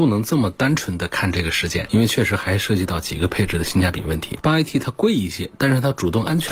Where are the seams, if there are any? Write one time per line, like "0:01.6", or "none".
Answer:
none